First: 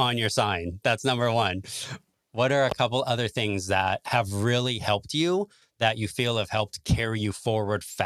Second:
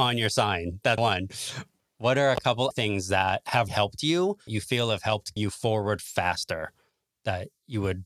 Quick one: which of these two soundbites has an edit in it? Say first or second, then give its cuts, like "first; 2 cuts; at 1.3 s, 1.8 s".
second; 5 cuts; at 1.0 s, 2.7 s, 3.7 s, 4.5 s, 5.4 s